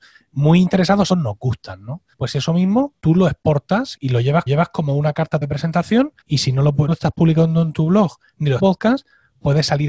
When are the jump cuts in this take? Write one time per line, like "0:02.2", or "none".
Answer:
0:01.1
0:02.1
0:03.0
0:04.0
0:04.5
0:05.4
0:06.2
0:06.9
0:08.6